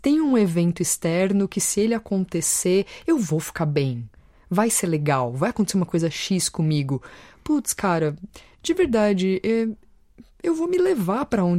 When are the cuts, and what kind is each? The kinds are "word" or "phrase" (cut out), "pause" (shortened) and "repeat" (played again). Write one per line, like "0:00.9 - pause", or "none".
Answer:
none